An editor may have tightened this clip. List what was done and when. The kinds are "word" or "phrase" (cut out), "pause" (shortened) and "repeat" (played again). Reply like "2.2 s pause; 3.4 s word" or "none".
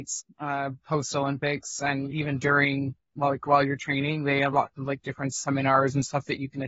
none